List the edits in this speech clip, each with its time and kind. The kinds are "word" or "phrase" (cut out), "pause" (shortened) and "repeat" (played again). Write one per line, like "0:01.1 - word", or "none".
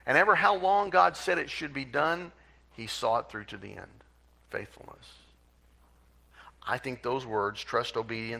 none